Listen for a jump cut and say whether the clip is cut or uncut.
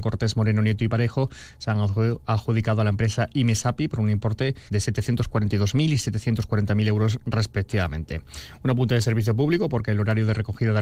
cut